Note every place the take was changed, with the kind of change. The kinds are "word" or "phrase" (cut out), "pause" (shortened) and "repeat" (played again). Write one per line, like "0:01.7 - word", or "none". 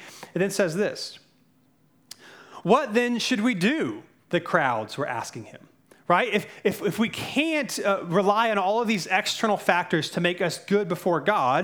none